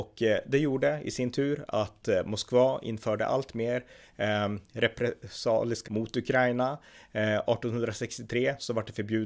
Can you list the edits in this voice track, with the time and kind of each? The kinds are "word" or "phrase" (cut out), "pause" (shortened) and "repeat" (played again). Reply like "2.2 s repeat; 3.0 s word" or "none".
5.9 s word